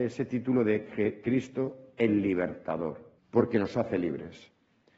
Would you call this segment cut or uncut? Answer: cut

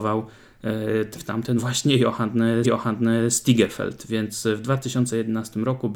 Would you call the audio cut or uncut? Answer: cut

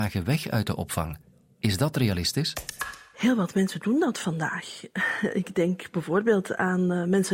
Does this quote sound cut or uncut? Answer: uncut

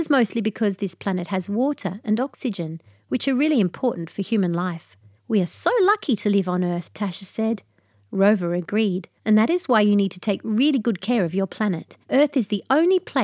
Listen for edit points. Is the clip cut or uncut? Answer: cut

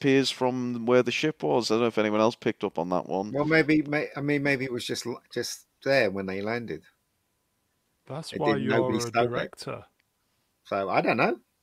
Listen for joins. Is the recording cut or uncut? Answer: uncut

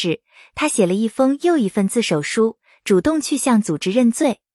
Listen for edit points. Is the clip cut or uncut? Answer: uncut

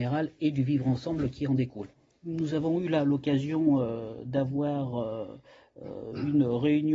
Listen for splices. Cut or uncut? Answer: uncut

